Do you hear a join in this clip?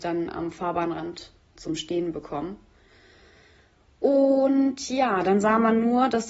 no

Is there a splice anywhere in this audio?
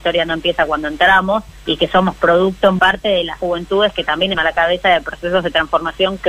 yes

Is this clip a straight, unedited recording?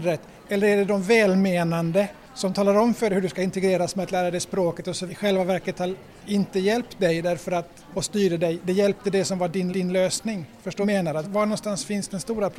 no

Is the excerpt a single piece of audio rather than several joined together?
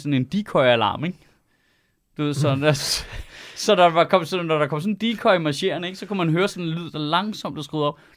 yes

